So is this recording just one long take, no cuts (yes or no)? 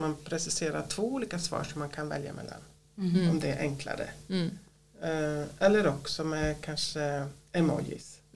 yes